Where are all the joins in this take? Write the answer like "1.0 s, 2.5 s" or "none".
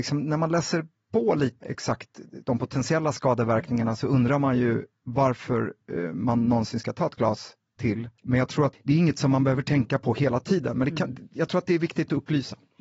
1.6 s, 8.2 s, 8.7 s